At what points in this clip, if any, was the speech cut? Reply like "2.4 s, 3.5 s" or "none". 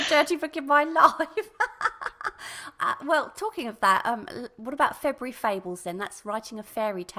none